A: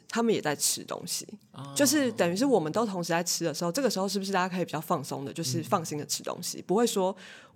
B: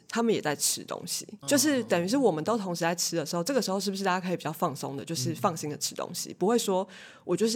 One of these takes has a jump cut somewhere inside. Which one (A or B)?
B